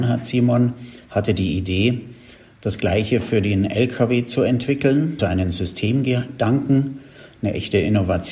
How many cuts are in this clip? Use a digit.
1